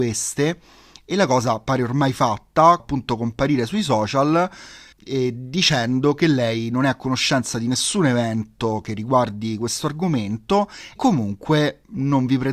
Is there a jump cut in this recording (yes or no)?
yes